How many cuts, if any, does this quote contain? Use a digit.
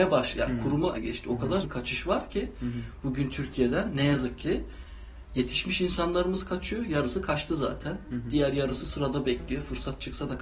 2